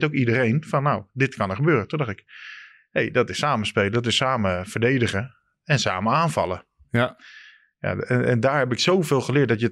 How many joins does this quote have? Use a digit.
0